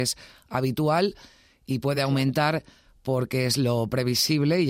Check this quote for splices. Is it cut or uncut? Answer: uncut